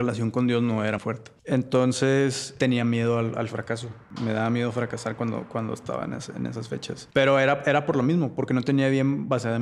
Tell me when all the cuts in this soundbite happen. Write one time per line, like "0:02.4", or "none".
0:01.0